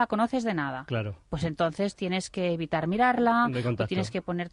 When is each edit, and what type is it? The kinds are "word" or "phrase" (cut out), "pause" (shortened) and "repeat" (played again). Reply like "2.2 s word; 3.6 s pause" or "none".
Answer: none